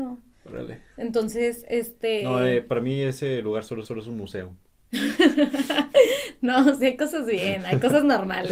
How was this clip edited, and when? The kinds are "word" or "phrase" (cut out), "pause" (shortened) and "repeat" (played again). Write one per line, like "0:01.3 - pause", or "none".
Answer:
0:03.8 - repeat